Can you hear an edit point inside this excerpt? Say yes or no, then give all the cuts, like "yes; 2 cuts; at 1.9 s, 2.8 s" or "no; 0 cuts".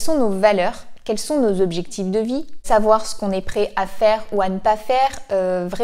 no; 0 cuts